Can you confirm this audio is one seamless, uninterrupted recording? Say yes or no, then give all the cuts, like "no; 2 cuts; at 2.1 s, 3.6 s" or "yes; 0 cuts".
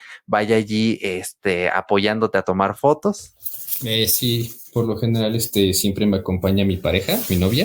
yes; 0 cuts